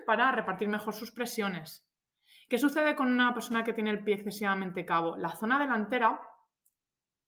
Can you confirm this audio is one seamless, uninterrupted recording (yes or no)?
yes